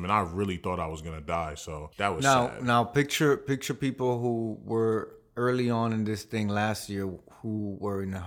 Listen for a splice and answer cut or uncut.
uncut